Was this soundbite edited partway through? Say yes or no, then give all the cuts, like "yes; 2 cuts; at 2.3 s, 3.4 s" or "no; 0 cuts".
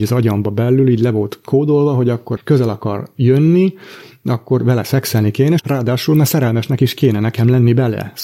yes; 2 cuts; at 2.4 s, 5.6 s